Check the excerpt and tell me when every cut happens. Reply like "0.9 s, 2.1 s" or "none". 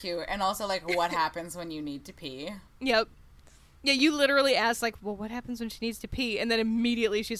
2.7 s